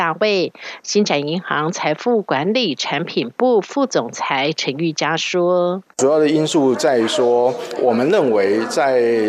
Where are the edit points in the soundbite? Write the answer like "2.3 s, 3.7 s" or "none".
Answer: 5.9 s, 7.8 s